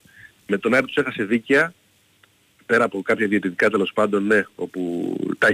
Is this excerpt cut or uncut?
uncut